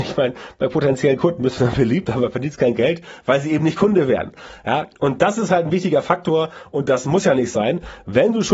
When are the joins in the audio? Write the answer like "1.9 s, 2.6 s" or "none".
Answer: none